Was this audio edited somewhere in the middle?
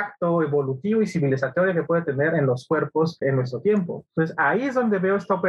yes; 1 cut; at 3.2 s

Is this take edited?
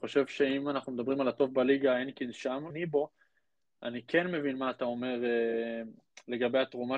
yes; 2 cuts; at 1.3 s, 2.7 s

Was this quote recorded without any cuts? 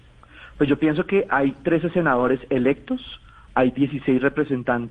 yes; 0 cuts

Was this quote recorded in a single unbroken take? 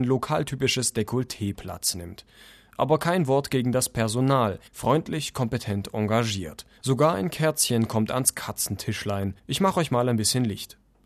no; 3 cuts; at 4.7 s, 6.8 s, 9.4 s

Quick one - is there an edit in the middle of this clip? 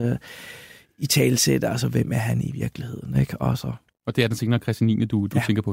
no; 0 cuts

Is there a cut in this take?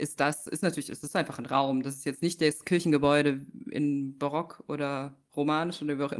no; 0 cuts

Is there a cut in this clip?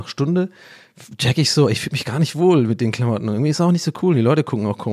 no; 0 cuts

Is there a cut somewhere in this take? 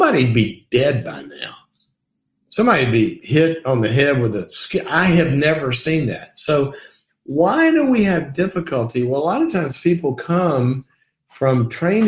no; 0 cuts

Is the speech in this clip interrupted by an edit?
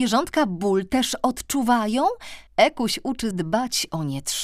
yes; 2 cuts; at 2.5 s, 3.3 s

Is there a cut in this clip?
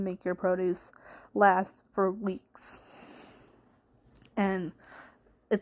no; 0 cuts

